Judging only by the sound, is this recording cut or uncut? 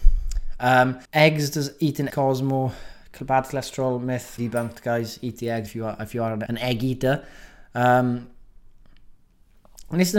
cut